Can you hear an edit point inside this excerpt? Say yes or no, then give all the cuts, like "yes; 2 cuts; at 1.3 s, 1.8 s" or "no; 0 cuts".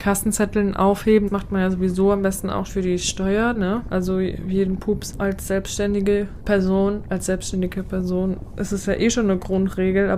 yes; 4 cuts; at 1.3 s, 2.7 s, 3.5 s, 5.1 s